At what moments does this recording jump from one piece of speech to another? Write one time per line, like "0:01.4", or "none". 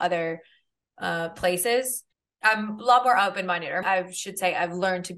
0:02.1
0:03.8